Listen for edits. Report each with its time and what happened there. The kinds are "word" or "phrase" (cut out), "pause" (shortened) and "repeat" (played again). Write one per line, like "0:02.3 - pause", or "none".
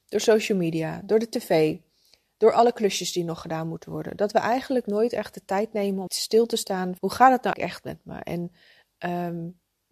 0:06.1 - word
0:07.0 - word
0:07.5 - word